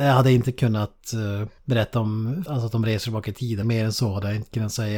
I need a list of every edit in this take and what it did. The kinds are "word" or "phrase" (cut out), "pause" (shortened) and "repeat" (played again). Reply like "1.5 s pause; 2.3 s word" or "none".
1.6 s pause; 2.5 s phrase; 3.6 s word